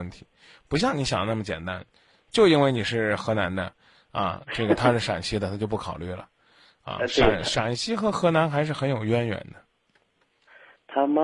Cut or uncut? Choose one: uncut